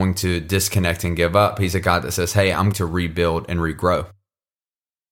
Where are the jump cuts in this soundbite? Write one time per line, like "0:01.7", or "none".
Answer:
0:02.7